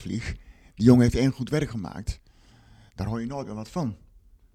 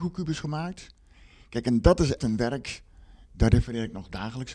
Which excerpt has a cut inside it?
second; 1 cut; at 2.2 s

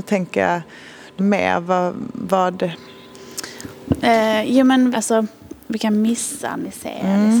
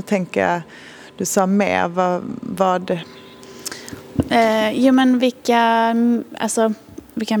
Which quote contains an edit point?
first; 2 cuts; at 1.2 s, 4.9 s

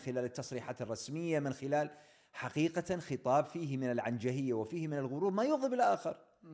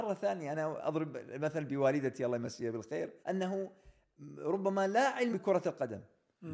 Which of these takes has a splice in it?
second; 2 cuts; at 3.2 s, 5.3 s

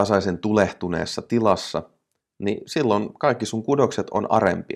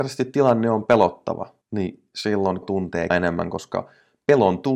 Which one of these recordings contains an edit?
second; 3 cuts; at 1.6 s, 2.6 s, 3.1 s

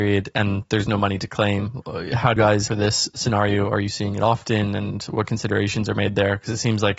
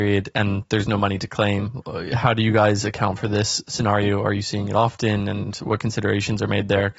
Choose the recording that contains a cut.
first; 2 cuts; at 2.4 s, 2.7 s

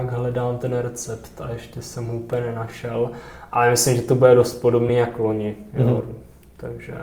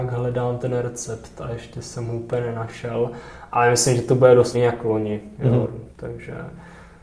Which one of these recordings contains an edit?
second; 2 cuts; at 4.5 s, 5.9 s

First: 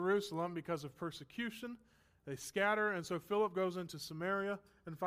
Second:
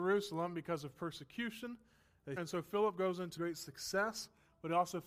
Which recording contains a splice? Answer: second; 2 cuts; at 2.4 s, 3.4 s

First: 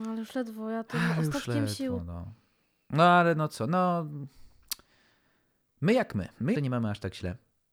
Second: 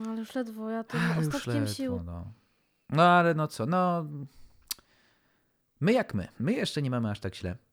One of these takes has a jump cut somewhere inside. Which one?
first; 1 cut; at 6.6 s

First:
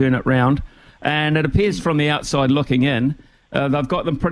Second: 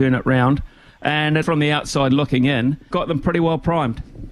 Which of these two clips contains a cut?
second; 2 cuts; at 1.4 s, 2.9 s

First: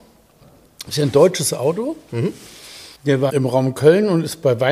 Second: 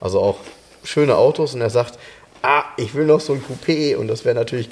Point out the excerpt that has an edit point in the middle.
first; 2 cuts; at 2.9 s, 3.3 s

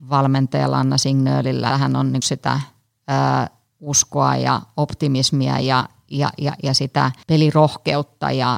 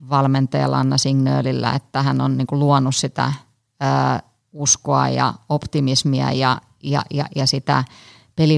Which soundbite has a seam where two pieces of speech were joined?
first; 3 cuts; at 1.7 s, 2.2 s, 7.2 s

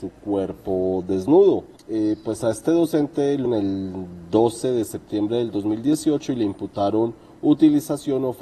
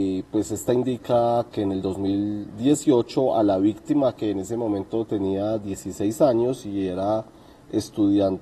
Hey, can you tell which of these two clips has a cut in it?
first; 2 cuts; at 1.8 s, 3.5 s

